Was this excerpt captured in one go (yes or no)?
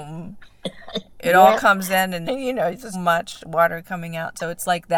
no